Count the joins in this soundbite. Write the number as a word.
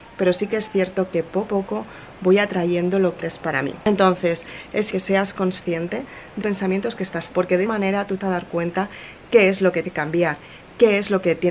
eight